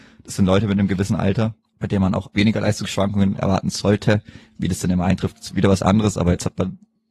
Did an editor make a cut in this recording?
yes; 2 cuts; at 1.7 s, 2.3 s

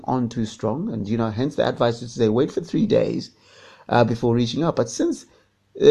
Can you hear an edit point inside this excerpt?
no; 0 cuts

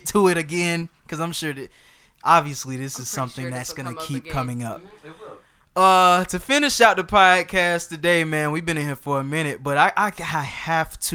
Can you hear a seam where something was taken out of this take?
no; 0 cuts

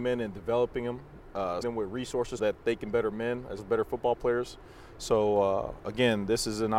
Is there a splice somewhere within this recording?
yes; 4 cuts; at 1.6 s, 2.4 s, 2.9 s, 3.6 s

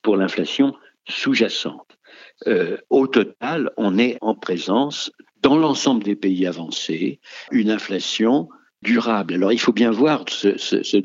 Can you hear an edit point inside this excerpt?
yes; 5 cuts; at 2.8 s, 4.2 s, 5.2 s, 7.5 s, 8.8 s

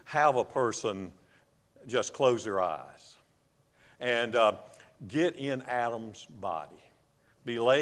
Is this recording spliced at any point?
no; 0 cuts

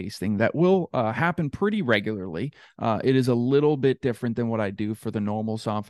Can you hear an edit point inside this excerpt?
no; 0 cuts

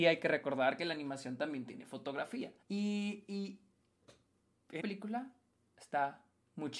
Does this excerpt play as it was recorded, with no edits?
no; 2 cuts; at 2.6 s, 4.8 s

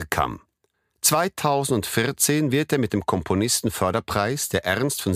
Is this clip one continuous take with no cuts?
yes; 0 cuts

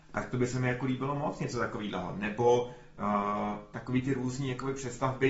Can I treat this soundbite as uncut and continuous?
yes; 0 cuts

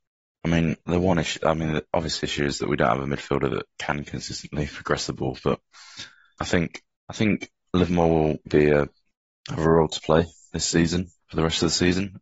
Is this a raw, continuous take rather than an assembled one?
no; 2 cuts; at 6.4 s, 8.5 s

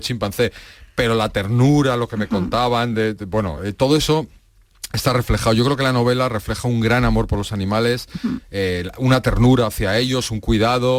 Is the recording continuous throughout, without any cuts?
yes; 0 cuts

